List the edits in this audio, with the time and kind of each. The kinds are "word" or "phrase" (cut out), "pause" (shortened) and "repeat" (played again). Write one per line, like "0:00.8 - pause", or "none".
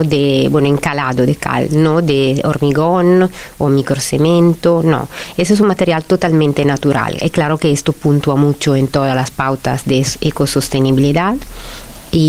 none

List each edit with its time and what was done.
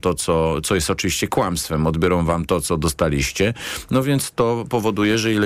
none

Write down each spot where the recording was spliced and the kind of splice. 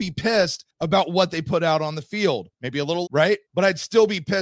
0:03.0 - phrase

